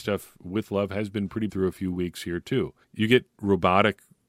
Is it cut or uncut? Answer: cut